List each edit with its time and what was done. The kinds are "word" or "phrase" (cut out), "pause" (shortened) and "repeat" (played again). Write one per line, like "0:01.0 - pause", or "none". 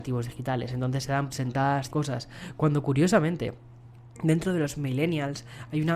0:01.3 - word
0:01.9 - word